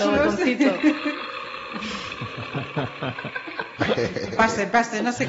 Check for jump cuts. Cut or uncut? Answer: uncut